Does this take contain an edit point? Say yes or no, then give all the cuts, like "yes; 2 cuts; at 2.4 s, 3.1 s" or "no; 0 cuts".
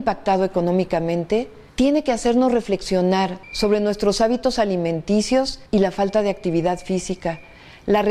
yes; 3 cuts; at 1.7 s, 3.4 s, 5.7 s